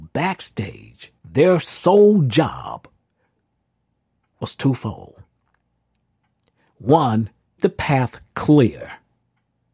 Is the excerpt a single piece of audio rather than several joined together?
no; 2 cuts; at 1.2 s, 7.6 s

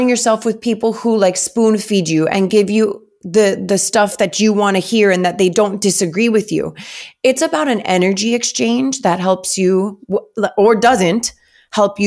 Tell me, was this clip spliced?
no; 0 cuts

